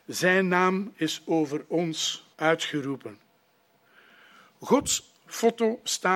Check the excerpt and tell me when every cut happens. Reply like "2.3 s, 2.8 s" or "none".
2.3 s

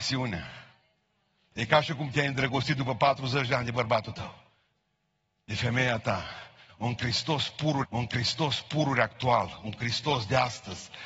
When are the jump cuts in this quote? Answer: 7.8 s

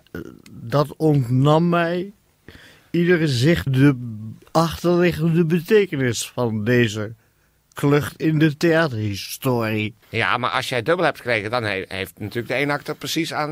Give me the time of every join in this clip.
3.7 s, 10.0 s

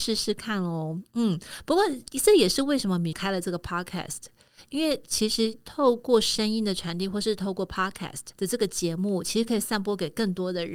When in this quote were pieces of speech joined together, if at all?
3.1 s, 8.3 s

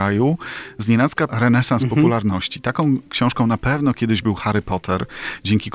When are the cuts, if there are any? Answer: 1.3 s

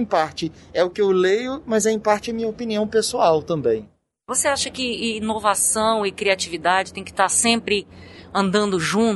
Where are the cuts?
none

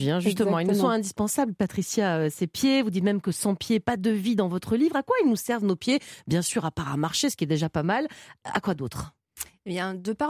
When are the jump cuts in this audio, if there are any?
none

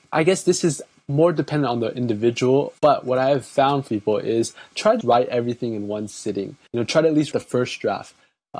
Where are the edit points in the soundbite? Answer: 2.8 s, 3.9 s, 5.0 s, 6.7 s, 7.3 s

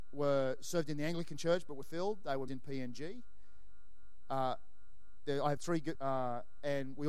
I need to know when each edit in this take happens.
1.8 s, 2.5 s, 5.6 s, 5.9 s

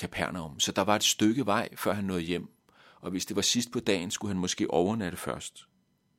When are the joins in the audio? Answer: none

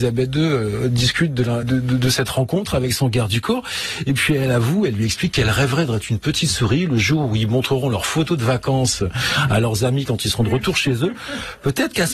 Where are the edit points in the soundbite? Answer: 1.6 s

